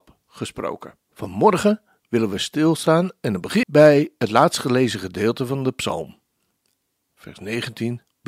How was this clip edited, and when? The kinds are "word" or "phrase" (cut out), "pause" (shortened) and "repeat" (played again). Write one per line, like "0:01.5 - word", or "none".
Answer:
0:01.0 - pause
0:03.6 - word